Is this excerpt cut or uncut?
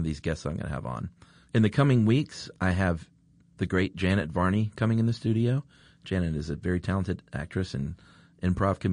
uncut